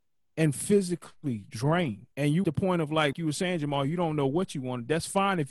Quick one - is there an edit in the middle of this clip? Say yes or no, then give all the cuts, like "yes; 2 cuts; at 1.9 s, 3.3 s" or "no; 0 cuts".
yes; 3 cuts; at 2.1 s, 2.4 s, 3.1 s